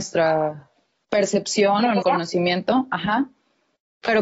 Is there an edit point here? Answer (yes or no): yes